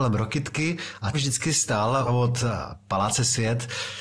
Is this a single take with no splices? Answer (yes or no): no